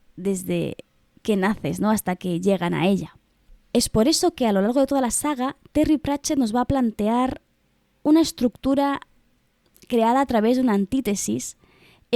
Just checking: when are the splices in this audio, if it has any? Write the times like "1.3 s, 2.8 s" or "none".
none